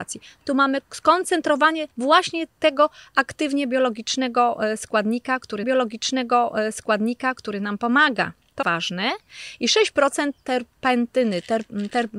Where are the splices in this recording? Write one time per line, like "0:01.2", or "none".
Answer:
0:01.9
0:05.6
0:08.6